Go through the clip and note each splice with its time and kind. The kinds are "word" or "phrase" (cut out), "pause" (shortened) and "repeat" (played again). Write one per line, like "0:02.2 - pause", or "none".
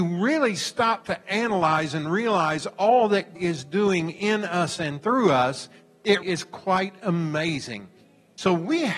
0:03.4 - word
0:06.2 - word

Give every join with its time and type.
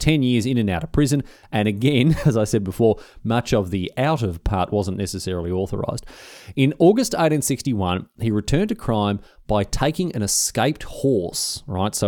none

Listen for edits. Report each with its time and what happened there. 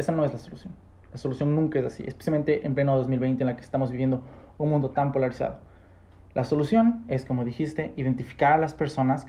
none

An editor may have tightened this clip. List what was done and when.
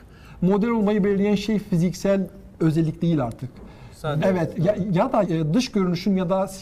0:02.5 - pause
0:04.2 - word
0:05.2 - phrase

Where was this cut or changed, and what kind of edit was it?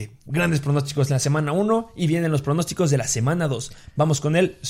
none

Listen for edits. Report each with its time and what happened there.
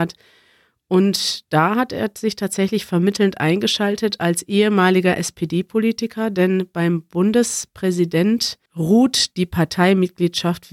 0:08.7 - pause

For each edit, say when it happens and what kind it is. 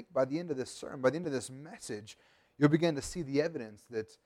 none

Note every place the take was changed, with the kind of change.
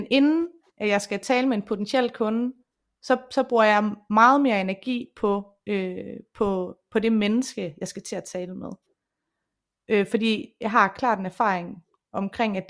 none

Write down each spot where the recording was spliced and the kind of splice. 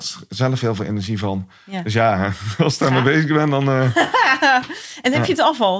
none

